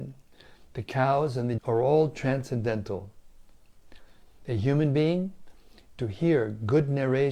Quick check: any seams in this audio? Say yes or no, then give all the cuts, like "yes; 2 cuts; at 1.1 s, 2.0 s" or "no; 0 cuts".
yes; 2 cuts; at 1.6 s, 5.9 s